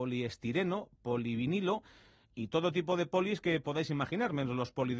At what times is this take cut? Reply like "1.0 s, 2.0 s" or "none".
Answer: none